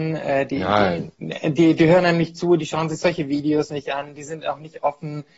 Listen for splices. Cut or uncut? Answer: uncut